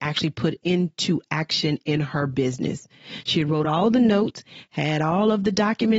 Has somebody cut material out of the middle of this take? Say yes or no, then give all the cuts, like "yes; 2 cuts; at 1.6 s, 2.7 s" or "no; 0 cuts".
no; 0 cuts